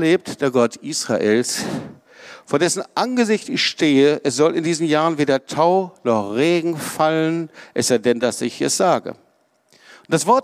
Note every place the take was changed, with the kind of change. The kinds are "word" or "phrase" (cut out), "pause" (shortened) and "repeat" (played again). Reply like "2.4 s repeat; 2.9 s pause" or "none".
none